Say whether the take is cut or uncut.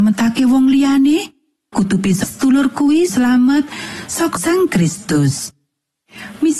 cut